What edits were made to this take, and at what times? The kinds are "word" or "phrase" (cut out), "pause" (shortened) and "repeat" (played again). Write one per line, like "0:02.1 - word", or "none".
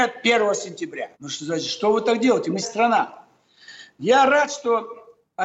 0:01.1 - pause
0:02.6 - word